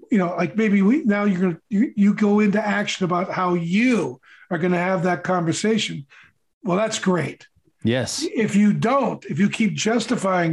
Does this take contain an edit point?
no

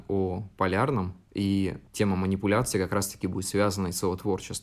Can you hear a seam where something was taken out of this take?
yes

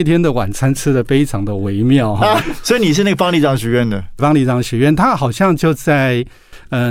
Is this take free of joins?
no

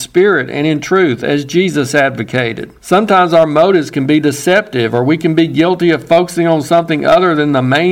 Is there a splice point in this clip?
yes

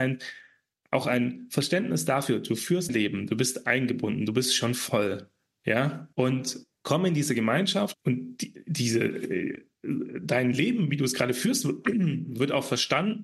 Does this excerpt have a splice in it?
yes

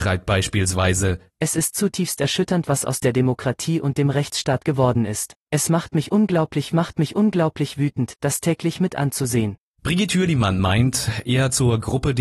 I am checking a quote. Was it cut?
yes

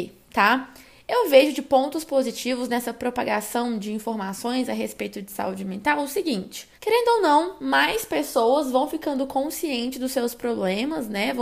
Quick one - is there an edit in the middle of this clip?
yes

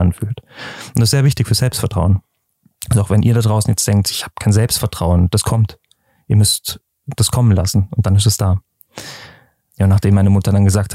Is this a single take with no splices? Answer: yes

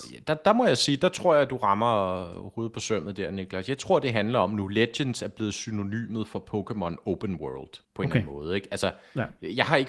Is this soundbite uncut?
no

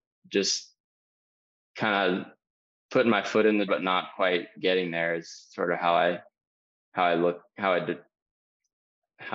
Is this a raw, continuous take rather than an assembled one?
no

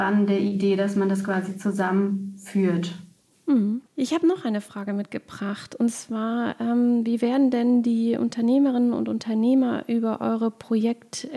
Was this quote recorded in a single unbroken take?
no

